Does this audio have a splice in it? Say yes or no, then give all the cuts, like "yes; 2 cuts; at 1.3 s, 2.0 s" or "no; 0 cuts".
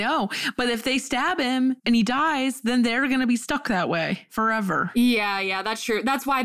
yes; 1 cut; at 1.8 s